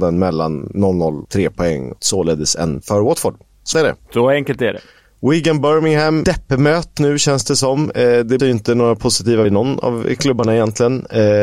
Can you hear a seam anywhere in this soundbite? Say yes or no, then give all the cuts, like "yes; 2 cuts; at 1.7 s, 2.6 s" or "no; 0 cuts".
yes; 8 cuts; at 1.2 s, 2.0 s, 2.8 s, 3.7 s, 6.2 s, 7.0 s, 8.4 s, 9.4 s